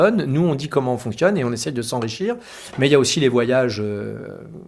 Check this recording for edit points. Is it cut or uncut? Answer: uncut